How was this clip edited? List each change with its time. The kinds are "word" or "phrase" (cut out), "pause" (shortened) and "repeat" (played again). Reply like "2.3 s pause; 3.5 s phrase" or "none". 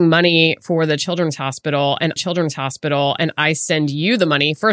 2.2 s repeat